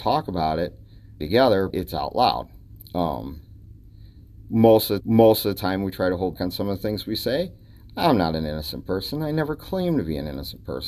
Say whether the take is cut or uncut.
cut